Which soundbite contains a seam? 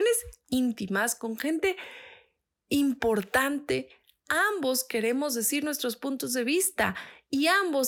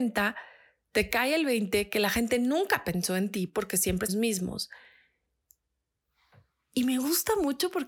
second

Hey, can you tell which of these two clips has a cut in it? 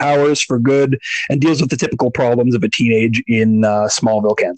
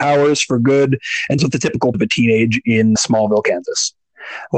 second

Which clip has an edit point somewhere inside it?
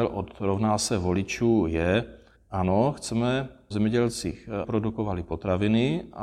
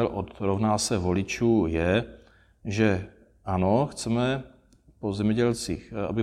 first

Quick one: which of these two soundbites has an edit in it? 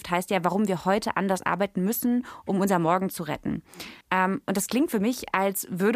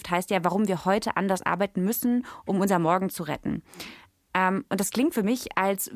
first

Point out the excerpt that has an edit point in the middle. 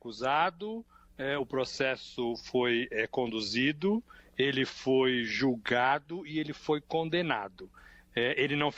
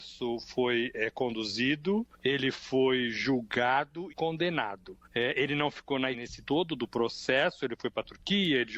second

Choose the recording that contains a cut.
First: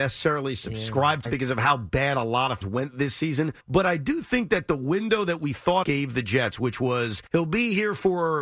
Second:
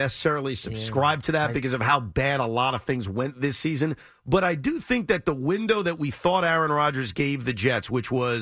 first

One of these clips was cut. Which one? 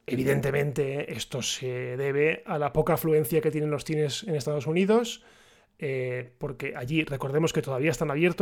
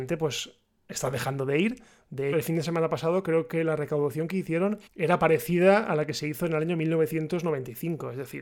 second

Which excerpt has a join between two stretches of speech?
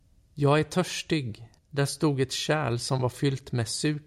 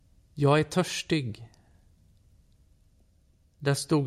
first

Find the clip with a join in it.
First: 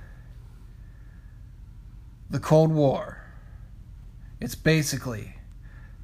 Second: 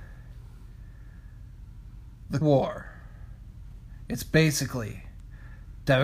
second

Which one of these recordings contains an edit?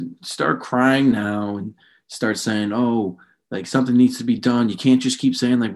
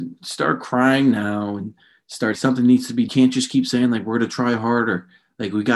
second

